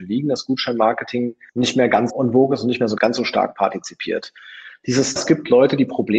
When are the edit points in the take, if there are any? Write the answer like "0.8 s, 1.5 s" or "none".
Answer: 1.5 s, 2.1 s, 3.0 s, 5.2 s

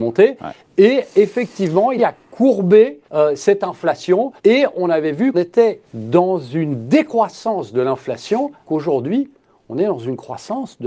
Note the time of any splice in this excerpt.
2.0 s, 3.1 s, 4.4 s, 5.3 s, 5.8 s, 8.6 s

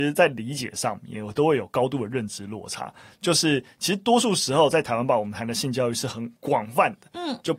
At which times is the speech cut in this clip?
6.4 s

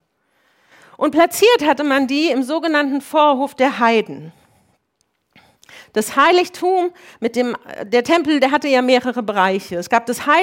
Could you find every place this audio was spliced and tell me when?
none

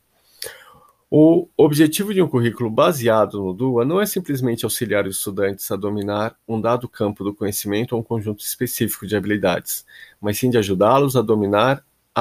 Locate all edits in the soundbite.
none

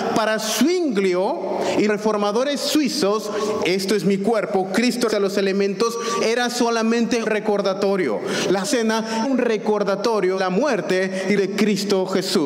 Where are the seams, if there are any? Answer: 1.9 s, 3.6 s, 5.1 s, 7.2 s, 8.6 s, 9.2 s, 10.4 s, 11.4 s

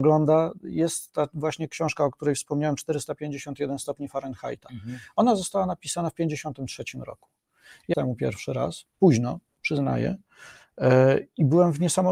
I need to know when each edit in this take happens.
7.9 s

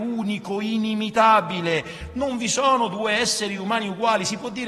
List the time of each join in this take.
none

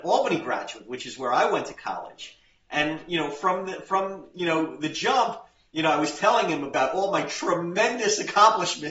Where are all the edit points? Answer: none

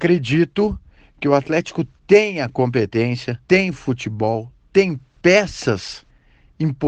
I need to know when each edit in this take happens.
3.4 s

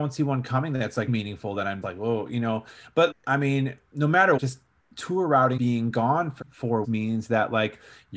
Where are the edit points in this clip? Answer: 1.1 s, 1.8 s, 3.1 s, 4.4 s, 5.6 s, 6.4 s, 6.8 s

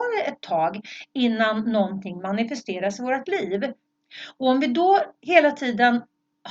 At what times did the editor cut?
none

